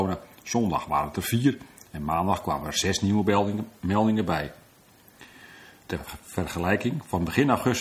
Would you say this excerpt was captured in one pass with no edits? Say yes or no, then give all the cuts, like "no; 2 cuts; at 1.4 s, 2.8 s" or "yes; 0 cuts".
yes; 0 cuts